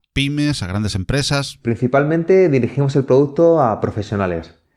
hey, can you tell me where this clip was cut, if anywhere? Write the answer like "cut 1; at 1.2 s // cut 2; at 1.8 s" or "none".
none